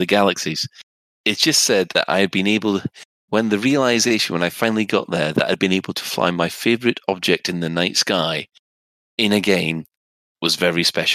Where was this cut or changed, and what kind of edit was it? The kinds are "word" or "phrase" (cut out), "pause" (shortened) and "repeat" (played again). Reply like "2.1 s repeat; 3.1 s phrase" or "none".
none